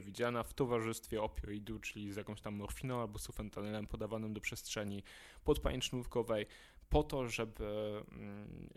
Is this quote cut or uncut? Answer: uncut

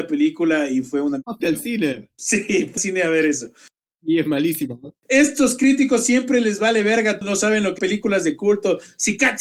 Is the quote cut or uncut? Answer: cut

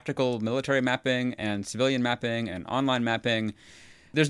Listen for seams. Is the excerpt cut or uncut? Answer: uncut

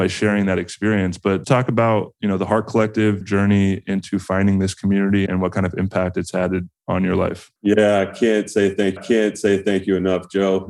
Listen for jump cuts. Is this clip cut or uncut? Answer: cut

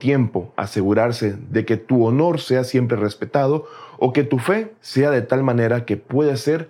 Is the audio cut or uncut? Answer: cut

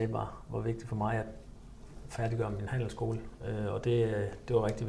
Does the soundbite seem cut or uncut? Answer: uncut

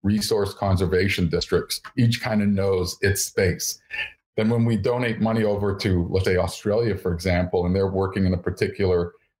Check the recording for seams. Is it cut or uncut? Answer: cut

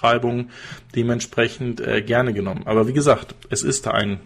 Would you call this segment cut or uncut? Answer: uncut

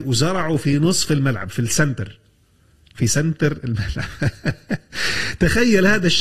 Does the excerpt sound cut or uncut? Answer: uncut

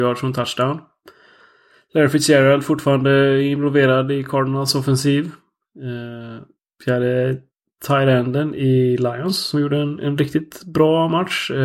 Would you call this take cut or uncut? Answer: uncut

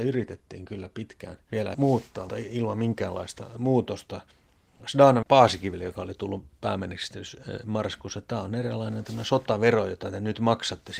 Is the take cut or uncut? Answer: cut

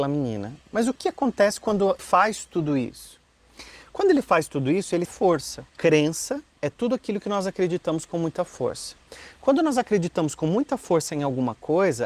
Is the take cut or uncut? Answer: cut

